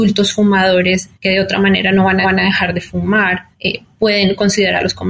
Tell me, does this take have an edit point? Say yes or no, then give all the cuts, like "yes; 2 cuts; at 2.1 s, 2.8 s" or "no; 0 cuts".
yes; 3 cuts; at 1.1 s, 2.2 s, 3.5 s